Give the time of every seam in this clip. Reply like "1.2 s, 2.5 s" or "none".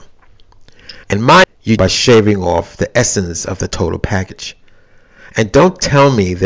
1.0 s, 1.4 s, 1.8 s